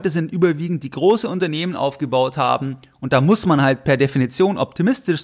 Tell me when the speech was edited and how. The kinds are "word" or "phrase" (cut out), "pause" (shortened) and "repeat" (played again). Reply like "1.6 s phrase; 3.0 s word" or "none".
none